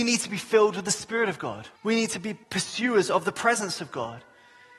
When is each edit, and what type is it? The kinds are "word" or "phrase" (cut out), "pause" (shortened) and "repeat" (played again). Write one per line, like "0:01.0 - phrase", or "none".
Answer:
0:01.8 - pause
0:02.4 - pause